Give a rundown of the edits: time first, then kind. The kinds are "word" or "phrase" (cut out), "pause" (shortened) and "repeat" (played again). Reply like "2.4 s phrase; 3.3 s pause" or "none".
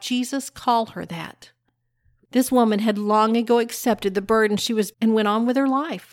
4.9 s word